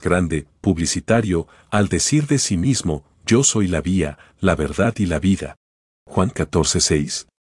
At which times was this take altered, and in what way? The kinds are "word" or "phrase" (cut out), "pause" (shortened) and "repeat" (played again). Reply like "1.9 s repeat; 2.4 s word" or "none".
none